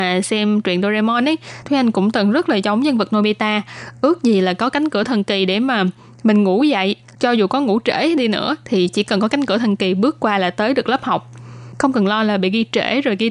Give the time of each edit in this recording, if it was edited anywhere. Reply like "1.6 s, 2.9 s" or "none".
none